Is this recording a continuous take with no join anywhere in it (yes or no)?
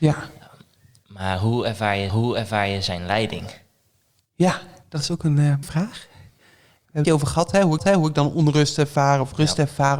no